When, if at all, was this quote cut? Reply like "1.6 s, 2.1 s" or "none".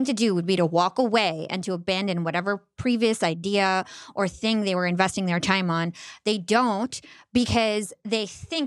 none